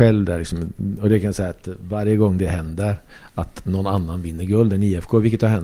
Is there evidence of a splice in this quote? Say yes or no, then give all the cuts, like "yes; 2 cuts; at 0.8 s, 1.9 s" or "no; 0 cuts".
no; 0 cuts